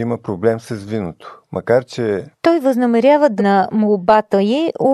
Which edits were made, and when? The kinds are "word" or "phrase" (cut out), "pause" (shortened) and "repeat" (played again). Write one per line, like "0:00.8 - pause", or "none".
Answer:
0:03.4 - word

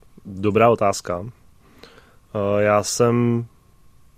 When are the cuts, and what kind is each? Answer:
none

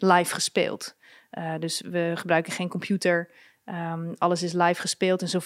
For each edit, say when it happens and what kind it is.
none

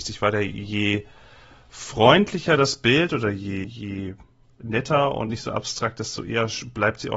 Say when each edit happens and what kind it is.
0:03.6 - word

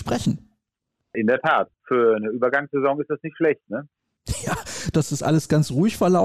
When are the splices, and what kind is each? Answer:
0:04.9 - word

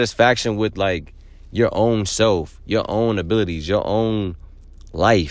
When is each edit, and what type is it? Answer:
none

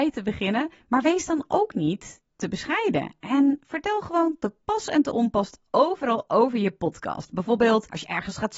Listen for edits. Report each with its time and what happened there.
none

